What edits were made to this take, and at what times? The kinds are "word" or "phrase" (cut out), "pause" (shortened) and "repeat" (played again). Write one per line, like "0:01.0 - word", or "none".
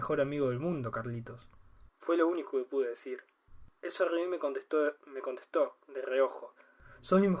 0:01.9 - pause
0:03.7 - pause